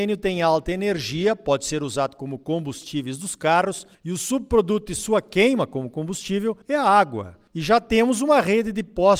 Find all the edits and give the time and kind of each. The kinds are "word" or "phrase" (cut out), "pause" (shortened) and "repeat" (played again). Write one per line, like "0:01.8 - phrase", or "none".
0:03.9 - pause
0:06.6 - pause
0:07.5 - pause